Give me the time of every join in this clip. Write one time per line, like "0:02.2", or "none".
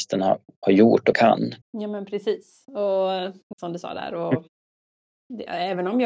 0:01.1
0:01.6
0:03.5

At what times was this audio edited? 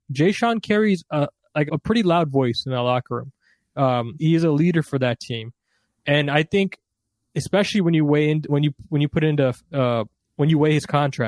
0:01.7
0:04.2
0:08.5
0:10.2

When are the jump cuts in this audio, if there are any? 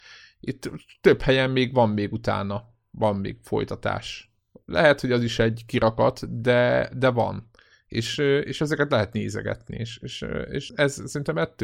0:10.7

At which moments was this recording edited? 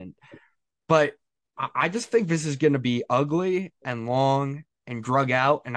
none

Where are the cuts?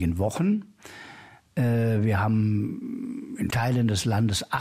0:03.5

